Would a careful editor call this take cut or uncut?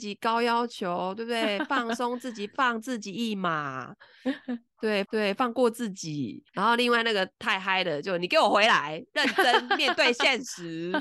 cut